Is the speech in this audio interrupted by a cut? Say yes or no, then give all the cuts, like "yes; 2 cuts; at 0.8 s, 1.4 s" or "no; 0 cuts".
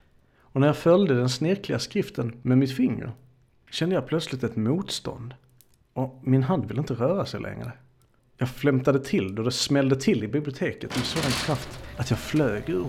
no; 0 cuts